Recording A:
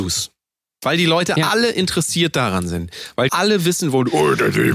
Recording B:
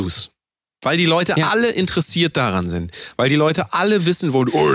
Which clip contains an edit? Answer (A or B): A